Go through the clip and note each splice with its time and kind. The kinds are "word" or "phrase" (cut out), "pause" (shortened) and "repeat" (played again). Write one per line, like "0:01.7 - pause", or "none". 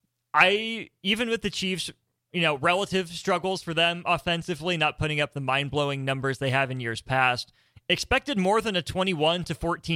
none